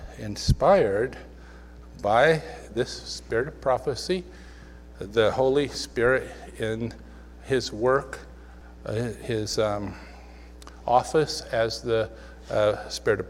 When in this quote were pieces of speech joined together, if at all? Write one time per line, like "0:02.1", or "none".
0:04.9